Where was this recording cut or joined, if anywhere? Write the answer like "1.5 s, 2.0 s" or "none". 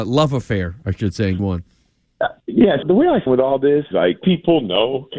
1.4 s, 2.8 s, 3.3 s, 3.9 s, 4.2 s